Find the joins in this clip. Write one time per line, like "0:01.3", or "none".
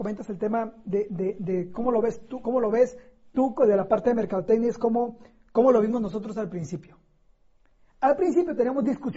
none

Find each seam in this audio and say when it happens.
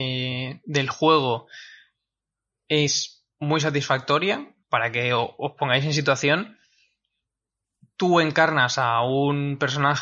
0:04.6

